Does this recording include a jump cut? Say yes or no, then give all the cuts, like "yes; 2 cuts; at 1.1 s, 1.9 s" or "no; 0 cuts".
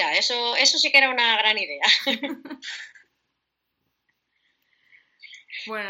no; 0 cuts